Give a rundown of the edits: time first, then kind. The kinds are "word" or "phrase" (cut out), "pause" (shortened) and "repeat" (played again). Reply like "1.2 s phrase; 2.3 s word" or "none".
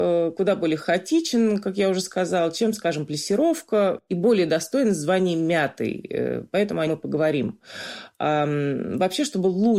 6.9 s word